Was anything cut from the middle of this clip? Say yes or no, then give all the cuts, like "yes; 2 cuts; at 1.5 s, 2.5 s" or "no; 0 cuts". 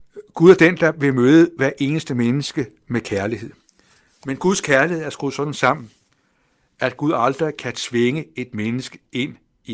no; 0 cuts